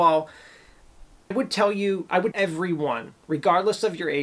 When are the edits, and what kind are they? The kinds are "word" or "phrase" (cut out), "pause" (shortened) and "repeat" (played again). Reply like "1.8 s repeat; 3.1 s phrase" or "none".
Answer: 1.3 s word; 2.3 s word